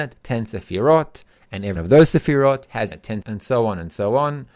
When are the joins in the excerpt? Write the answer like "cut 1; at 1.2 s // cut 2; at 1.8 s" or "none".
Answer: cut 1; at 1.8 s // cut 2; at 2.9 s // cut 3; at 3.2 s